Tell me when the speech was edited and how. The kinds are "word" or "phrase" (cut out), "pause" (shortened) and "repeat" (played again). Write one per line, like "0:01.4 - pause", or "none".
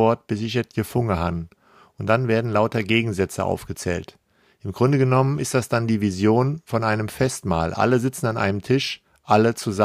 none